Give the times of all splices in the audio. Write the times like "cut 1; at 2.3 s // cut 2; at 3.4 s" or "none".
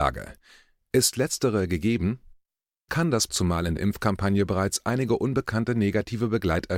cut 1; at 2.9 s // cut 2; at 3.3 s // cut 3; at 3.8 s